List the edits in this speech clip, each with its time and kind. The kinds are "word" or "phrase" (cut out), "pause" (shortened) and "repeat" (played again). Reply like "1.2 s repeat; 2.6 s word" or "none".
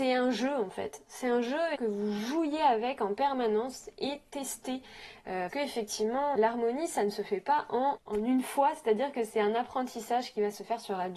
1.8 s phrase; 5.5 s word; 6.4 s word; 8.0 s word